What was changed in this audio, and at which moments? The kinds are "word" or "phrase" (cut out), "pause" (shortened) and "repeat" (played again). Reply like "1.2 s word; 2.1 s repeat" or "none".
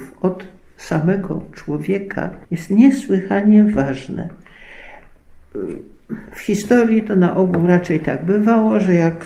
2.4 s pause